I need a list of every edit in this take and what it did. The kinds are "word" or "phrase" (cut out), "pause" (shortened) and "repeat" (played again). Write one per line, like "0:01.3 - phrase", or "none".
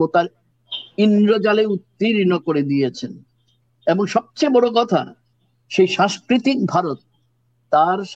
none

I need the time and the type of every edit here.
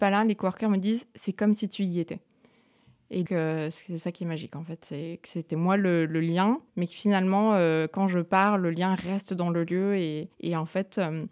0:03.3 - word
0:06.7 - pause
0:10.3 - pause

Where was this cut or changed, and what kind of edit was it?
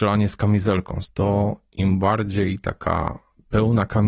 0:01.0 - phrase

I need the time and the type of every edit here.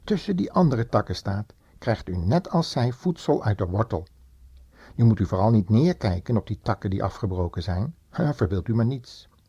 0:08.0 - pause

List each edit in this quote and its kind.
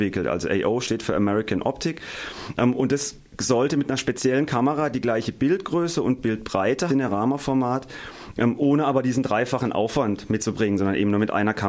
0:06.9 - phrase
0:10.4 - word

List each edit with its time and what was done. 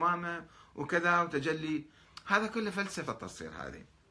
0:03.1 - word

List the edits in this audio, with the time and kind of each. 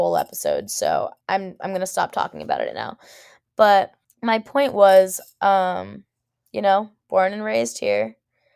0:01.2 - pause
0:04.0 - pause

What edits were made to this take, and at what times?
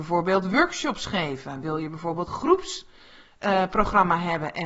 0:02.3 - word

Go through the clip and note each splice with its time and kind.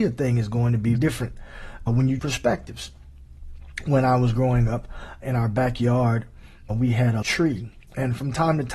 0:01.0 - word
0:01.9 - word
0:02.2 - word
0:05.2 - word
0:06.7 - word
0:07.2 - word

